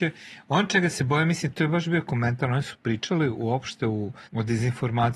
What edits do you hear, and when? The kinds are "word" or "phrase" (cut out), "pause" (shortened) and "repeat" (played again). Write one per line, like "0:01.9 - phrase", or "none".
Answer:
0:04.3 - pause